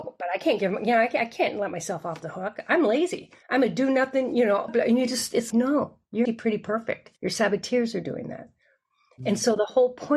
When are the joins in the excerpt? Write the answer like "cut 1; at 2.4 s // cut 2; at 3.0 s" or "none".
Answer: cut 1; at 3.4 s // cut 2; at 4.7 s // cut 3; at 5.5 s // cut 4; at 6.3 s // cut 5; at 7.2 s